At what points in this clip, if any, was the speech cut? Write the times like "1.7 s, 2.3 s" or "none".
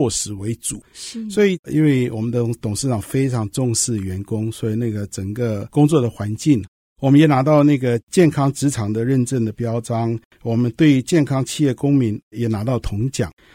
none